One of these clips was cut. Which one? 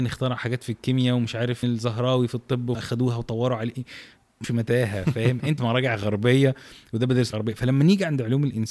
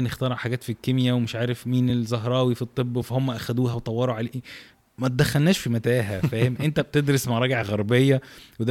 first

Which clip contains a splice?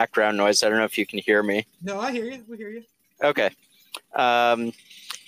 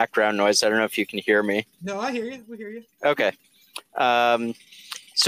second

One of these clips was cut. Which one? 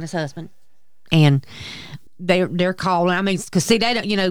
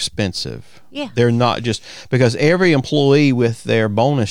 first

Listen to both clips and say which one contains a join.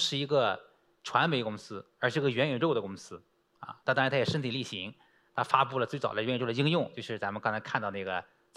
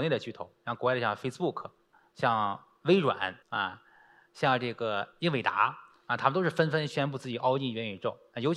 second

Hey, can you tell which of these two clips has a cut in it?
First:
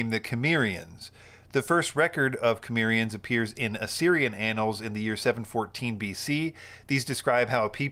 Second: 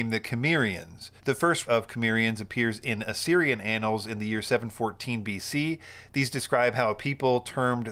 second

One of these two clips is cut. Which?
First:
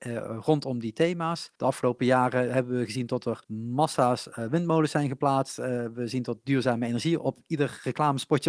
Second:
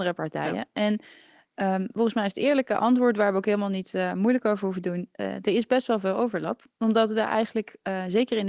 first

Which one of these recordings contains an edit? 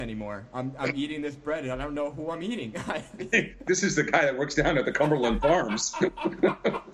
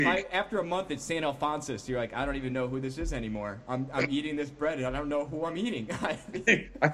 first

